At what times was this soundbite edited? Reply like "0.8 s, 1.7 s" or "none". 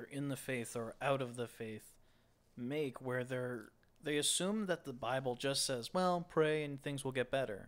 none